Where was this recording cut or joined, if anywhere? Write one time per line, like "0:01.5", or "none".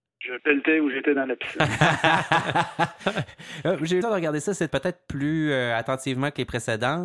0:04.0
0:04.7